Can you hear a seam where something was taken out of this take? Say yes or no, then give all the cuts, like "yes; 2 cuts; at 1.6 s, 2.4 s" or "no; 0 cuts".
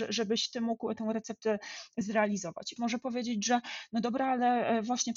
yes; 1 cut; at 2.8 s